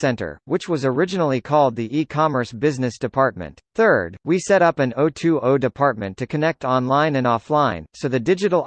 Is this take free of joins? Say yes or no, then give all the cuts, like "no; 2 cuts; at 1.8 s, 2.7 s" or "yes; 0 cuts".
no; 1 cut; at 3.6 s